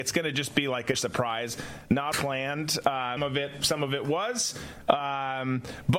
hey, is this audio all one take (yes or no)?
no